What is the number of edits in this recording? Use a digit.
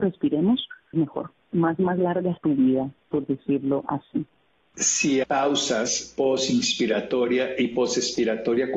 3